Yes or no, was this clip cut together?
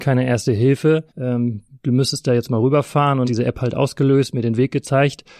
yes